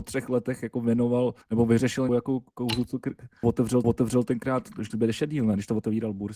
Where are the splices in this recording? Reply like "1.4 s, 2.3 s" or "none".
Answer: 1.4 s, 2.1 s, 3.4 s, 3.8 s, 4.9 s